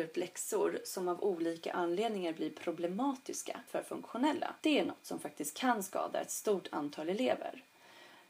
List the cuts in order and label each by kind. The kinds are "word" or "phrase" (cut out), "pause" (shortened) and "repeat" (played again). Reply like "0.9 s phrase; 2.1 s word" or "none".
3.7 s word; 4.6 s pause